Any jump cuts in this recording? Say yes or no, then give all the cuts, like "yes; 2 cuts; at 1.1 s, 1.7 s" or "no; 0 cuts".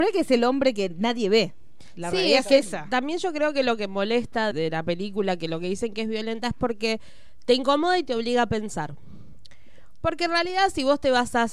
yes; 1 cut; at 4.5 s